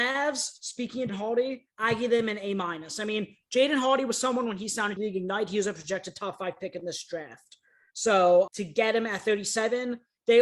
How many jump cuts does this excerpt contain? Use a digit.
4